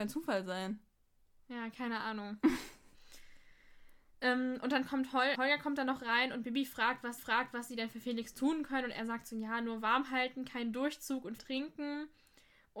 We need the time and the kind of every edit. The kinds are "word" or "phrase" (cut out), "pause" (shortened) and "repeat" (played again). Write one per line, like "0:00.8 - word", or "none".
0:04.1 - pause
0:05.3 - word
0:07.2 - repeat
0:11.4 - word